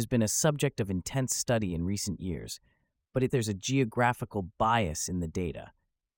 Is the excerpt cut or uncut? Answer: cut